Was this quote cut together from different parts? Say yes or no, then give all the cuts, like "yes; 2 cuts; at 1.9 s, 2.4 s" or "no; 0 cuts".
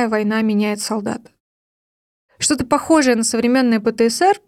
no; 0 cuts